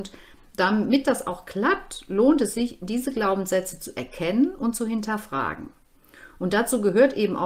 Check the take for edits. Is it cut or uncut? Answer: uncut